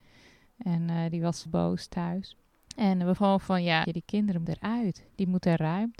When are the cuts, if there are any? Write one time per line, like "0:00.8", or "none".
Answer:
0:01.5
0:02.5
0:03.2
0:03.8
0:04.5